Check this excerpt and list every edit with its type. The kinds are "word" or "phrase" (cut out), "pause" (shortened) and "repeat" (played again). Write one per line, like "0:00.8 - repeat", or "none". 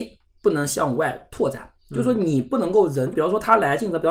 0:01.8 - pause
0:03.1 - phrase